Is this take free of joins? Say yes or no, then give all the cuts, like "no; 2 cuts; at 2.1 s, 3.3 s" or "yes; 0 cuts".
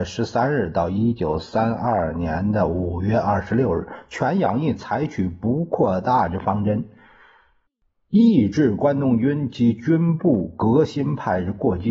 yes; 0 cuts